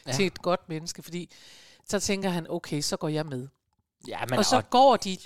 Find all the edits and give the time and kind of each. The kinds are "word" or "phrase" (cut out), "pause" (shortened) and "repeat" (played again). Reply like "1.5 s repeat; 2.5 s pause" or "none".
none